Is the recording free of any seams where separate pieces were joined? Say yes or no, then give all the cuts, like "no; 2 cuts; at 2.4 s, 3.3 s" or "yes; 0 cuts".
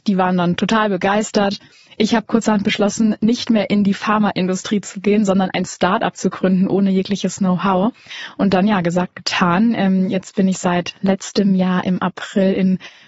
yes; 0 cuts